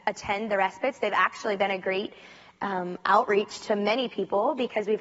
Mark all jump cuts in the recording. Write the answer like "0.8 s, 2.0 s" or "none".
none